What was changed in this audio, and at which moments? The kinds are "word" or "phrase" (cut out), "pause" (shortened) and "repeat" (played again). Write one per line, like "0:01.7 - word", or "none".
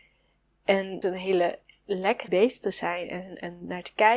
0:01.0 - phrase
0:02.3 - phrase

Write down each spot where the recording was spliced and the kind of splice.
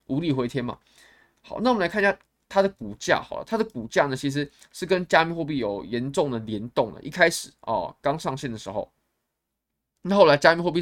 none

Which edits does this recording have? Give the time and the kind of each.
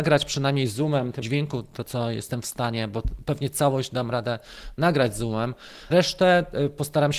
0:01.2 - word
0:05.9 - word

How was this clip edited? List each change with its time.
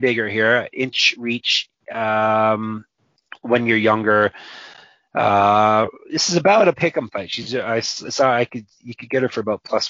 none

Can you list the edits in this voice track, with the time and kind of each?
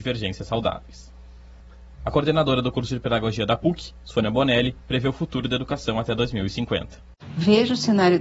none

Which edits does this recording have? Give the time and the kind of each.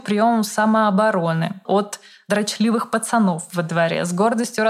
0:01.7 - word

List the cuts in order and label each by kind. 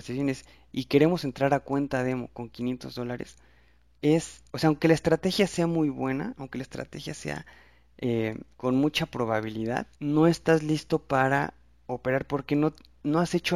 0:04.5 - pause
0:08.5 - pause
0:09.9 - pause

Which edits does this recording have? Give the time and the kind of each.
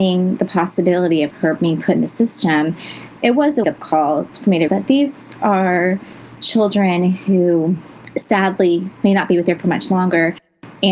0:03.6 - word
0:04.7 - word
0:09.6 - word

